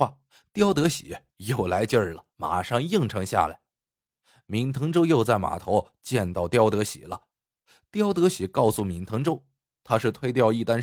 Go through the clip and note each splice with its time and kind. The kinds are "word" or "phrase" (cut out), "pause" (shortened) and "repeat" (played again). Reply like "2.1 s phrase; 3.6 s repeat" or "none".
2.3 s pause

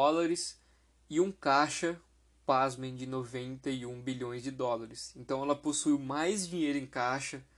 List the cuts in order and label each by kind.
none

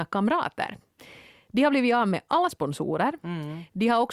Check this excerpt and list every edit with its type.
2.5 s word

